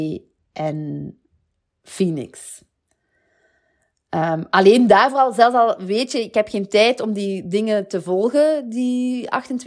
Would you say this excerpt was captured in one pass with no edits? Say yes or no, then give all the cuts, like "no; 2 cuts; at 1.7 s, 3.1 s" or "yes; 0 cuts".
yes; 0 cuts